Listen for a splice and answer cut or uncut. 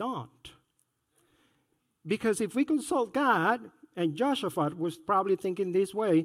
uncut